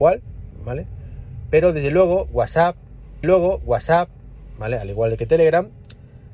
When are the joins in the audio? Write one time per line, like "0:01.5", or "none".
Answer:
0:03.2